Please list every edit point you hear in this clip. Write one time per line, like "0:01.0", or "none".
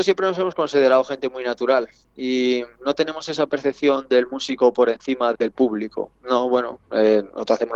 0:05.3